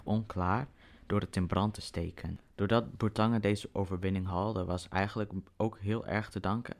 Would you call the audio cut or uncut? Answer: uncut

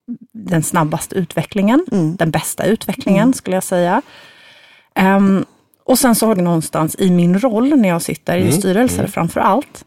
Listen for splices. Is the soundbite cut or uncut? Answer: cut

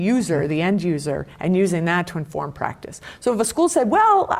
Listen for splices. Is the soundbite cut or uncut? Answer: uncut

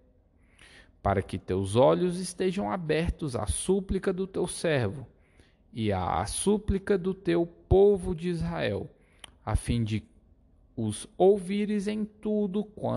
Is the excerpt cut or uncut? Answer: uncut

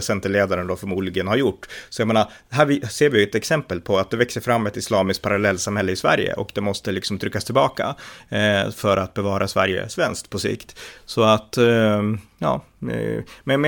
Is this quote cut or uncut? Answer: uncut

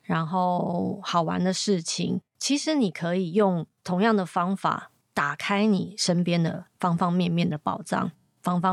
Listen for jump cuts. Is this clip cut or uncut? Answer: cut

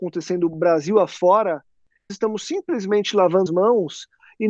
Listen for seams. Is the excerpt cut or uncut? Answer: cut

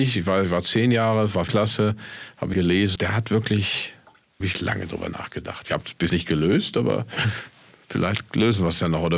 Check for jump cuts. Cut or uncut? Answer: cut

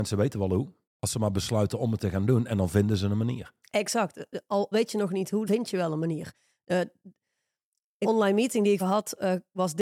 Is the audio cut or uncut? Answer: cut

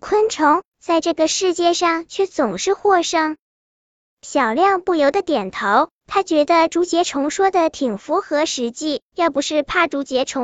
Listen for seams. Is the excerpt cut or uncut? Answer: cut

